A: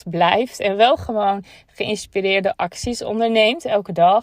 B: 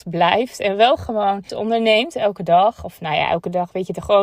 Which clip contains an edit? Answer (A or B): B